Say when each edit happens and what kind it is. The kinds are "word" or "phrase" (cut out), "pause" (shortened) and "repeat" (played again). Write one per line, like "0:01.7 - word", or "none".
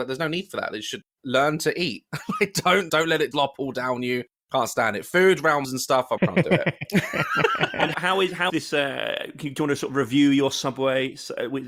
0:02.9 - word
0:03.3 - word
0:05.6 - word
0:06.2 - word
0:07.9 - word
0:08.5 - word